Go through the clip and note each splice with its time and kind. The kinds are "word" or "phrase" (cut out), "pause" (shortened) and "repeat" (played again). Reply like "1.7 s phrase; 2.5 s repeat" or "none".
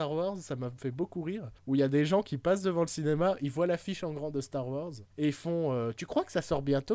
1.6 s pause; 5.1 s pause